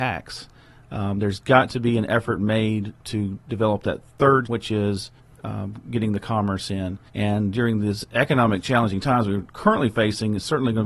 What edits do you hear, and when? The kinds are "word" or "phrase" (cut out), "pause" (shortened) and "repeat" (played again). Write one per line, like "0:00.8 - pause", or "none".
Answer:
0:04.5 - word
0:05.2 - pause
0:07.1 - pause

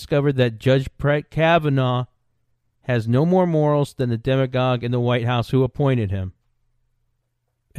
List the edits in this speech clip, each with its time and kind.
none

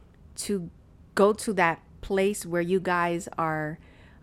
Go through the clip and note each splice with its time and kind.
none

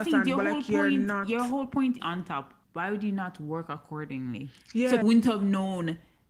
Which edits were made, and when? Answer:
0:02.0 - phrase
0:02.6 - pause
0:05.0 - word

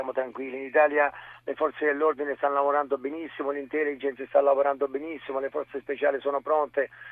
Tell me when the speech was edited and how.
none

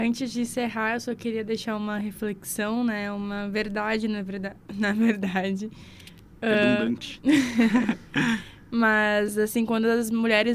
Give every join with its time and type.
none

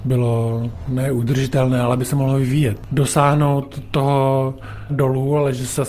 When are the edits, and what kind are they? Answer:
0:04.9 - phrase

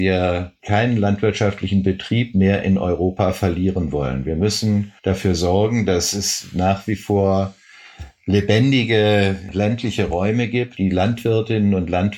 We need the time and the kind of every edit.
0:05.0 - pause

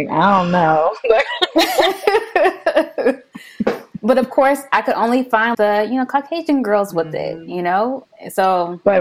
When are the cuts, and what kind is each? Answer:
0:05.5 - word

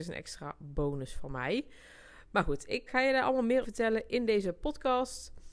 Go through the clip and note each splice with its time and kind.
0:02.9 - word
0:03.6 - word

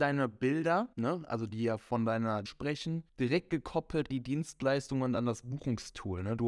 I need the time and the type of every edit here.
0:00.9 - pause
0:02.5 - word
0:03.1 - pause
0:04.1 - word

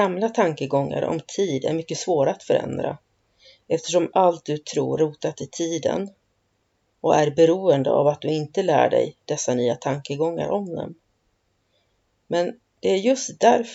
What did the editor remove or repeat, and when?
0:05.0 - word

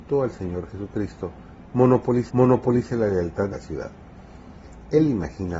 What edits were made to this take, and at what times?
0:02.3 - repeat
0:03.5 - phrase

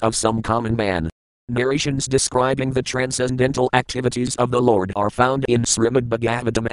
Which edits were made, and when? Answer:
none

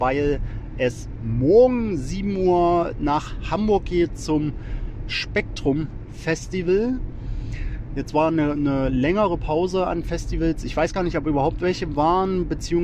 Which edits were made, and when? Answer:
none

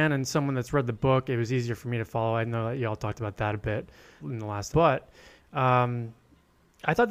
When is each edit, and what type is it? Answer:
0:04.2 - word
0:04.7 - word

